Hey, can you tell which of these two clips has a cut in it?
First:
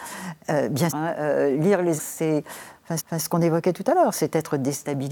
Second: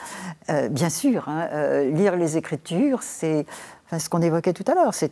first; 3 cuts; at 0.9 s, 2.0 s, 3.0 s

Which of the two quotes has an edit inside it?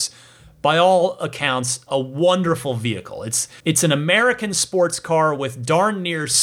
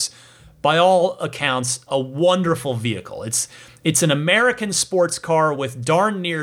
first; 1 cut; at 3.6 s

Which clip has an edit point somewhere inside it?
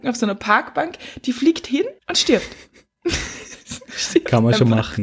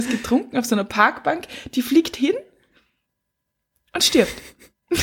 first; 1 cut; at 2.0 s

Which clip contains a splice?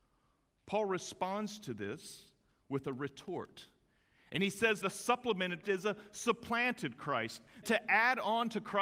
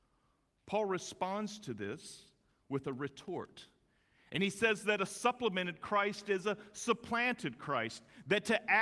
first; 3 cuts; at 4.8 s, 5.6 s, 7.6 s

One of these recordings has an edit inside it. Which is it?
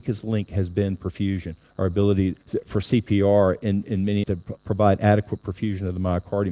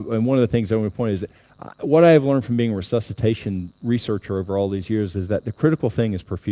first; 4 cuts; at 2.4 s, 3.8 s, 4.2 s, 4.6 s

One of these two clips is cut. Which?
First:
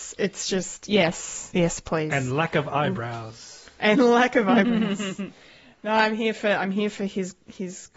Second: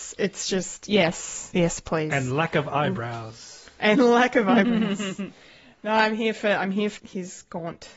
second; 1 cut; at 7.0 s

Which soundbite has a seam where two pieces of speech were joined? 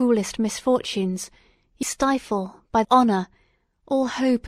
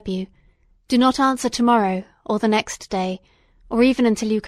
first; 2 cuts; at 1.8 s, 2.8 s

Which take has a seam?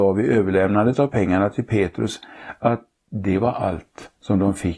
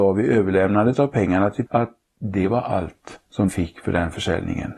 second; 2 cuts; at 1.7 s, 3.5 s

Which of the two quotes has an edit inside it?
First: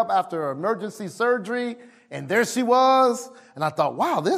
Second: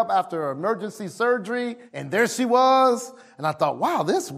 second; 1 cut; at 1.9 s

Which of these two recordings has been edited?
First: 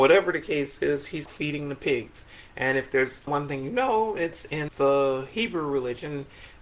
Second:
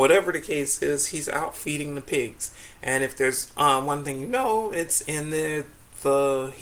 first; 3 cuts; at 1.3 s, 3.3 s, 4.7 s

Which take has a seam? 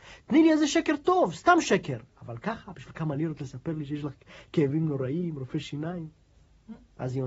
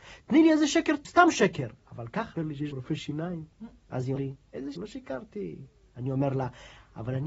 second; 6 cuts; at 1.0 s, 2.4 s, 2.7 s, 3.5 s, 4.2 s, 4.8 s

